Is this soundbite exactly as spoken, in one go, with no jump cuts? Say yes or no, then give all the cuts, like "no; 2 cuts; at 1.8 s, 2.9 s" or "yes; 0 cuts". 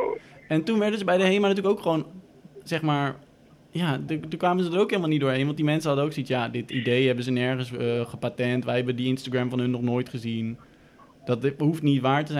yes; 0 cuts